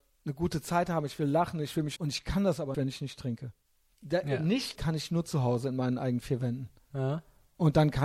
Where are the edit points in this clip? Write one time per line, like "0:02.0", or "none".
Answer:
0:02.0
0:02.7
0:03.7
0:04.8